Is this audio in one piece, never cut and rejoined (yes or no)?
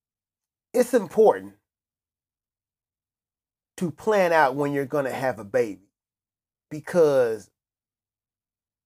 yes